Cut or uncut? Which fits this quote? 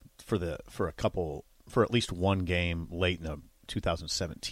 uncut